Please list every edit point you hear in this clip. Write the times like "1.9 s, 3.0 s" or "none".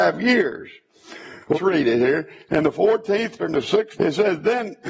1.5 s, 3.4 s, 4.0 s